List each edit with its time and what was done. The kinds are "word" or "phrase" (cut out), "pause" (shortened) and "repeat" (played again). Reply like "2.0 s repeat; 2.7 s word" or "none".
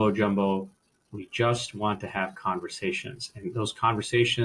none